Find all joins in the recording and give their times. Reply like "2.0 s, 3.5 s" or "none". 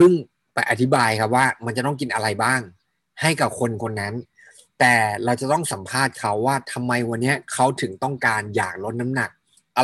none